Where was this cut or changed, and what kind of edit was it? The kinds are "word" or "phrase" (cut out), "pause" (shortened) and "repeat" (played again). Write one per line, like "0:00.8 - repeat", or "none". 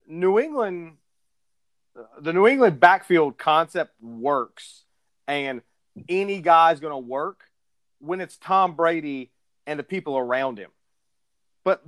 none

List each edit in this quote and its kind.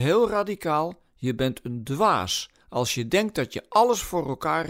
0:02.6 - pause

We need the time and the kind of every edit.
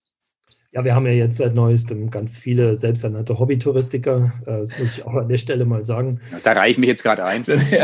none

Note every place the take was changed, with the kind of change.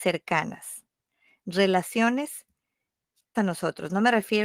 0:03.3 - word

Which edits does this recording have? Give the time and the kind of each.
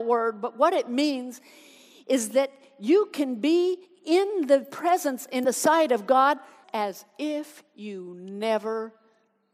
0:05.4 - word
0:06.6 - word

